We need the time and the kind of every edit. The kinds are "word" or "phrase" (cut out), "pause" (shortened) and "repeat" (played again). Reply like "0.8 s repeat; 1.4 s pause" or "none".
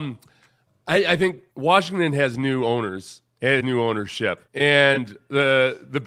1.5 s pause; 3.6 s word; 4.5 s pause